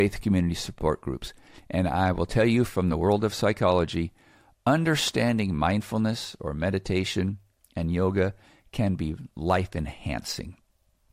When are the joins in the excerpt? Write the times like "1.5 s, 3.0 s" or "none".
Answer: none